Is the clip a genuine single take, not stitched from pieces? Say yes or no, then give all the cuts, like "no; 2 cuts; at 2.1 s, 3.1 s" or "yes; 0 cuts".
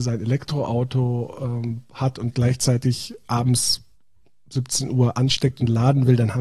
yes; 0 cuts